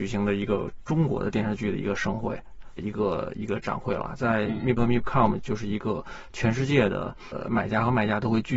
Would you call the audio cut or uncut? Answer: cut